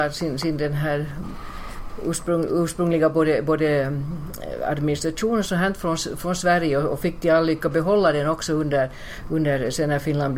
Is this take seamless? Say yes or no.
yes